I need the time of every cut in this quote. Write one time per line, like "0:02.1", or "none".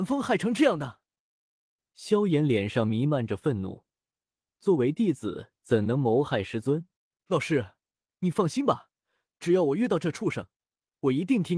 0:07.0